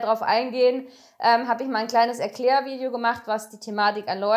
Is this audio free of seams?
yes; 0 cuts

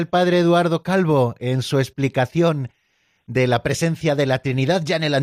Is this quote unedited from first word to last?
yes; 0 cuts

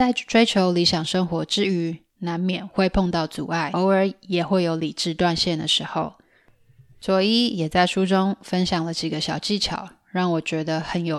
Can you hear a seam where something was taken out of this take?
no; 0 cuts

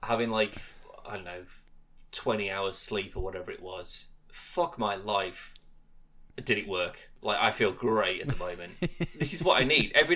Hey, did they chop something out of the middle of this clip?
no; 0 cuts

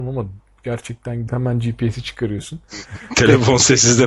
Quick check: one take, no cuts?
no; 1 cut; at 1.3 s

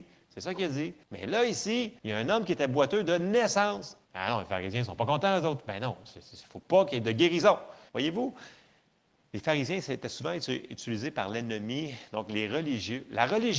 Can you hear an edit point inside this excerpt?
yes; 4 cuts; at 1.0 s, 2.0 s, 4.0 s, 7.9 s

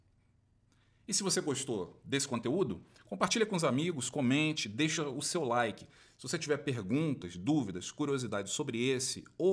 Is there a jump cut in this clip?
no; 0 cuts

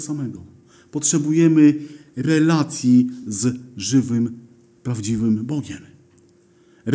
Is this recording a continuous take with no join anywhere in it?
yes; 0 cuts

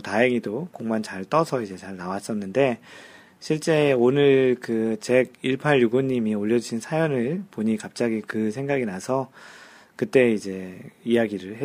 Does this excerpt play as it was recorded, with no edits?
yes; 0 cuts

